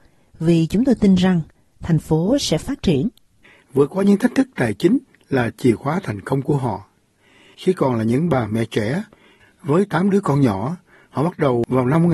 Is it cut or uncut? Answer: uncut